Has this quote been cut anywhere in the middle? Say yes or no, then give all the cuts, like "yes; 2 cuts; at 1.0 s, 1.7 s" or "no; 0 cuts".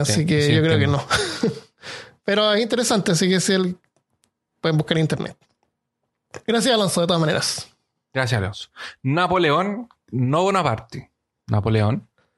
no; 0 cuts